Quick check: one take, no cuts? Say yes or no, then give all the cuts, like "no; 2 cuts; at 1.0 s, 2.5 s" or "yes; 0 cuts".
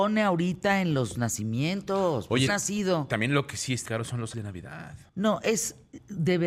no; 4 cuts; at 2.5 s, 3.9 s, 4.3 s, 5.1 s